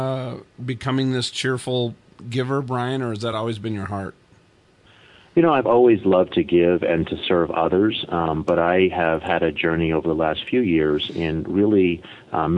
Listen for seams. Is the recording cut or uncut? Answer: uncut